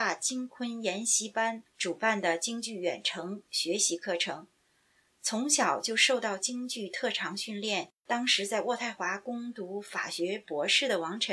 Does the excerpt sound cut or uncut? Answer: cut